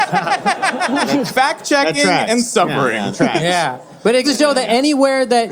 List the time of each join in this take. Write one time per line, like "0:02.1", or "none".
0:01.3
0:03.1
0:04.2